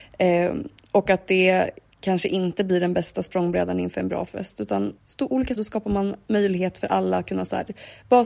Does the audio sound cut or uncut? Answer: cut